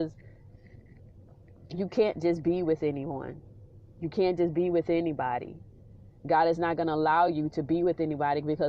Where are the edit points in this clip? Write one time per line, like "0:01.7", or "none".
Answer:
none